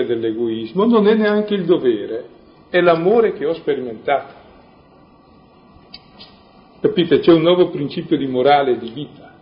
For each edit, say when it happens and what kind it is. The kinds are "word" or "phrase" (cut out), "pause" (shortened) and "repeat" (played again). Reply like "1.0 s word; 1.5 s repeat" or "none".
none